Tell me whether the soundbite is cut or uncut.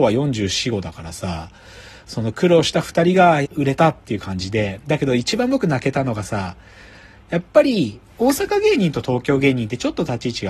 cut